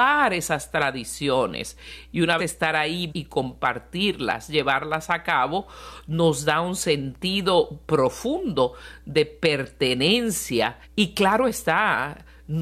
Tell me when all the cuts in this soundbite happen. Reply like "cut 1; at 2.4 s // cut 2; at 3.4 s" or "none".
cut 1; at 2.4 s // cut 2; at 3.1 s // cut 3; at 10.8 s